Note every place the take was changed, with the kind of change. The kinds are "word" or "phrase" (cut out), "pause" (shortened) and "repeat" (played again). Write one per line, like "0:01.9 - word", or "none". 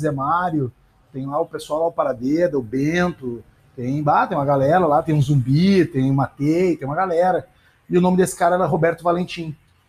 none